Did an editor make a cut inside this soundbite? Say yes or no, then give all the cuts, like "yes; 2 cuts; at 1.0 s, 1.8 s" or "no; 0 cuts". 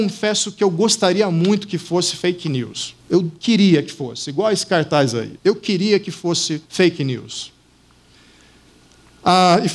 yes; 3 cuts; at 3.0 s, 5.4 s, 6.6 s